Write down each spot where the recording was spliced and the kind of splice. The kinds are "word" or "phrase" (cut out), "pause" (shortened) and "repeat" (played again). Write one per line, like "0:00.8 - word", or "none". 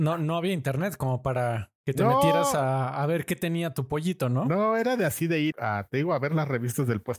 0:05.5 - word

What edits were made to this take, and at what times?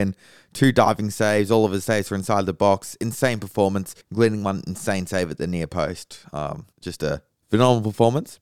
0:04.0 - pause
0:06.7 - pause
0:07.3 - pause

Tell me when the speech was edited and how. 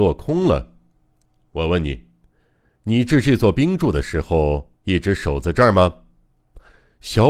0:04.8 - pause

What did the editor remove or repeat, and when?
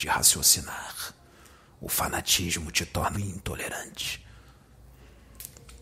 0:03.1 - word

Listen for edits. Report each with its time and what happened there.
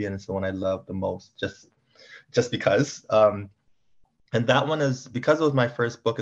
none

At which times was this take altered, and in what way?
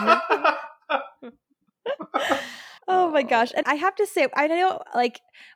0:02.8 - pause
0:03.6 - word

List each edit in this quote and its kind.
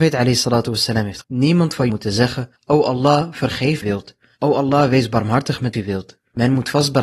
0:01.2 - word
0:01.9 - phrase
0:02.6 - pause
0:03.8 - phrase
0:05.7 - phrase

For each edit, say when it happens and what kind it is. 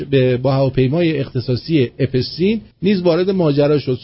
0:02.7 - pause

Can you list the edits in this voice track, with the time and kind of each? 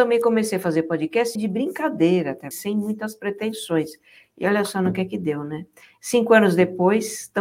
0:01.4 - word
0:02.5 - word

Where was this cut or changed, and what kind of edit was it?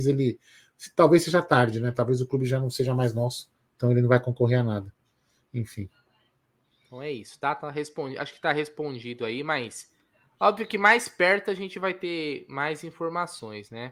none

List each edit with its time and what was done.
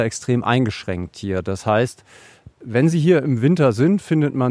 none

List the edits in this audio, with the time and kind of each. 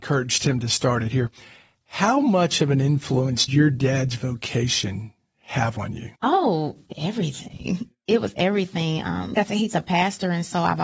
0:03.5 - word
0:06.2 - pause
0:06.9 - word
0:09.3 - word

